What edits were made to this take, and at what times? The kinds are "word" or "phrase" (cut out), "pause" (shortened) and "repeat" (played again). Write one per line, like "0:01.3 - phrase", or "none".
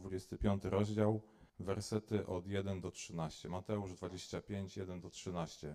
0:01.5 - pause